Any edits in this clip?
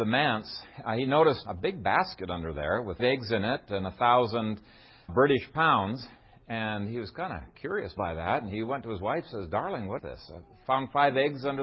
yes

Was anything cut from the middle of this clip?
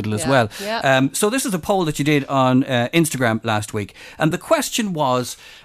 no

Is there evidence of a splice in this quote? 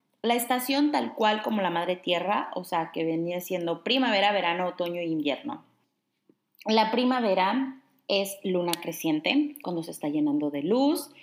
no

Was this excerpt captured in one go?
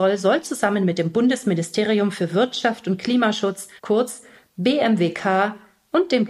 no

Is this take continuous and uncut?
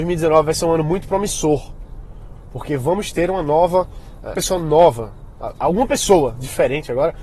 no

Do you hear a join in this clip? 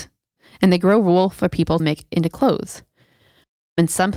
yes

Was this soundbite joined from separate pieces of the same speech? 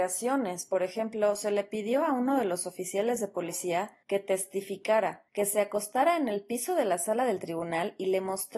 yes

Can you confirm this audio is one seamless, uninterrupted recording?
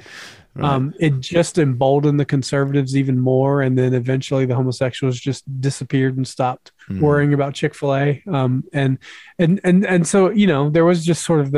no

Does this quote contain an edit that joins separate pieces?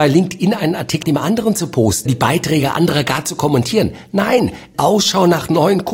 yes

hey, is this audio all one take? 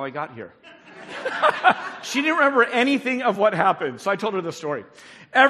yes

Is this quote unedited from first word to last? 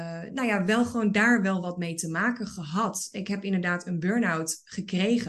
yes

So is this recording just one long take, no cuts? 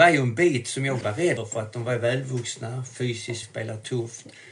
no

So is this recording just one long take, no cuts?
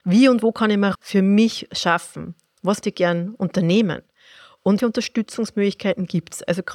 no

